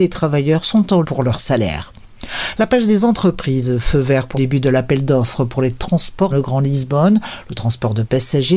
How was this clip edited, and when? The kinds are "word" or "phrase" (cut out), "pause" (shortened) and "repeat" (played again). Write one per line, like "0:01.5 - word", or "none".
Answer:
0:01.0 - word
0:04.3 - word
0:06.3 - word